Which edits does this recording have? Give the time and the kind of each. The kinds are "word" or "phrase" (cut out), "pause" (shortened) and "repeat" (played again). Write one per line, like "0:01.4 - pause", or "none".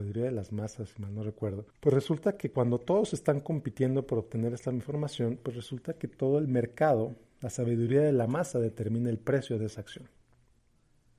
0:01.7 - pause